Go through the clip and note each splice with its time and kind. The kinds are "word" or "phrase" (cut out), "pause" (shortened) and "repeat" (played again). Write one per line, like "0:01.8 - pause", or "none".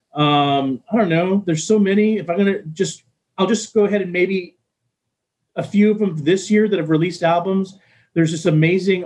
none